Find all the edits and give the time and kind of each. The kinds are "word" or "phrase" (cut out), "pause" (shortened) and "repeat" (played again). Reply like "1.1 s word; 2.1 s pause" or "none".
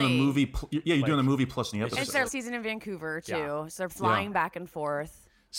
1.7 s word; 2.3 s word; 3.9 s word